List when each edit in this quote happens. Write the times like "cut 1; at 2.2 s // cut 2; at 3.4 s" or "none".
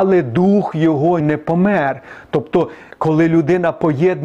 cut 1; at 1.2 s // cut 2; at 2.9 s